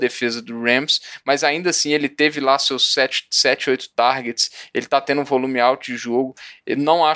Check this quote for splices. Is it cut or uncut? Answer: uncut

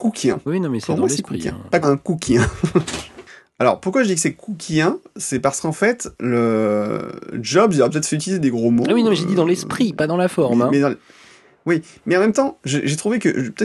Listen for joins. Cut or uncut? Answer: cut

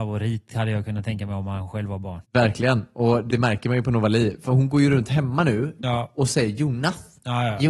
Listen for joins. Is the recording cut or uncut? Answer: cut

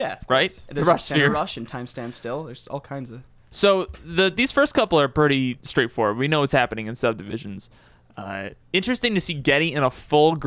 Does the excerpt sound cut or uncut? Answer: uncut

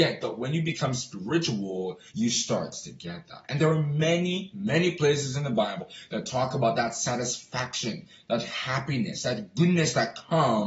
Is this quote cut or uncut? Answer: cut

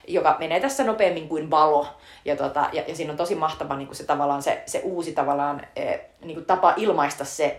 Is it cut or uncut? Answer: uncut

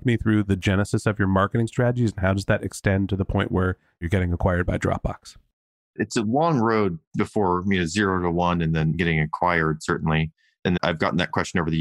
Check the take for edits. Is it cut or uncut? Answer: cut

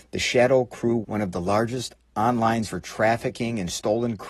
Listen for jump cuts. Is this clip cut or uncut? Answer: cut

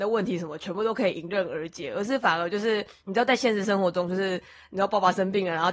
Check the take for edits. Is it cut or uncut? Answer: uncut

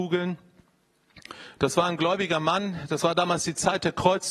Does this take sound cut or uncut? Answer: uncut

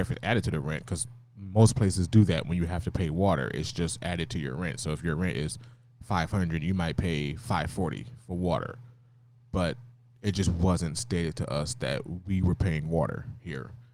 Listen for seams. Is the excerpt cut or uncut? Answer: uncut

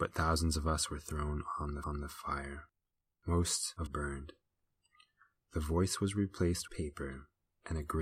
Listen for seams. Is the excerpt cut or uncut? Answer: cut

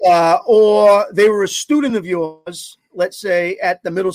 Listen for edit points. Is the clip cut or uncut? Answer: uncut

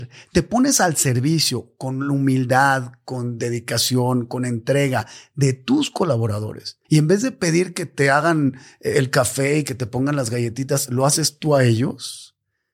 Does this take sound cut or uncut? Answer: cut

